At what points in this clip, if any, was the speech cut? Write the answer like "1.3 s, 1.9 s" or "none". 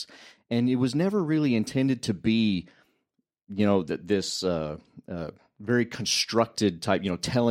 none